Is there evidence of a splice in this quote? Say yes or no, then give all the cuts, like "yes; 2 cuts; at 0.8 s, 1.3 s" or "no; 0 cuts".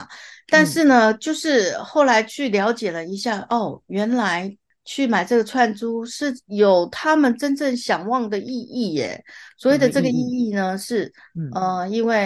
no; 0 cuts